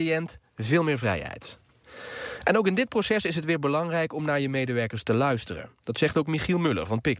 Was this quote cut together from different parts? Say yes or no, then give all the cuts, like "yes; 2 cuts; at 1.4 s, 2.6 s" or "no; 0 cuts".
no; 0 cuts